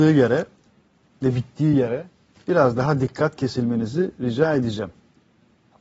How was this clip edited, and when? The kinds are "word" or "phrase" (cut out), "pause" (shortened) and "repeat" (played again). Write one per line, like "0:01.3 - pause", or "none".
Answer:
none